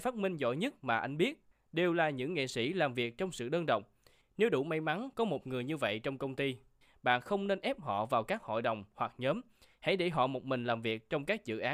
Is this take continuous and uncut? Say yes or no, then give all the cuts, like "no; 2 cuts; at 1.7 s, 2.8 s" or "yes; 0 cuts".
yes; 0 cuts